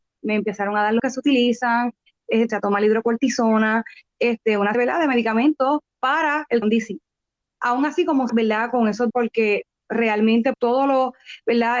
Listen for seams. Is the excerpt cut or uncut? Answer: cut